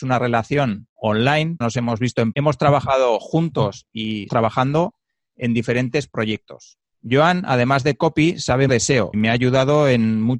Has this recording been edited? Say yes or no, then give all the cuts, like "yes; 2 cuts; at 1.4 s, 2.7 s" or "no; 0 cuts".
yes; 6 cuts; at 1.6 s, 2.3 s, 4.3 s, 6.9 s, 8.7 s, 9.1 s